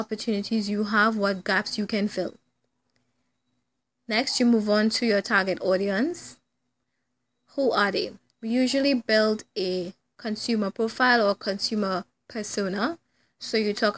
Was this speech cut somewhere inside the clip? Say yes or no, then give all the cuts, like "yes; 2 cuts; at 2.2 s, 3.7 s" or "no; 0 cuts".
no; 0 cuts